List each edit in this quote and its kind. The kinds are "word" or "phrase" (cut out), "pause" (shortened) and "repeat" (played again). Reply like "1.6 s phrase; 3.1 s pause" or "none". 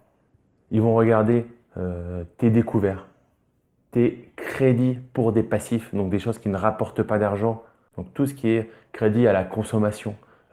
none